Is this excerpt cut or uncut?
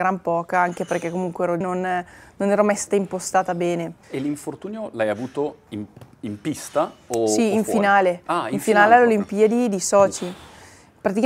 cut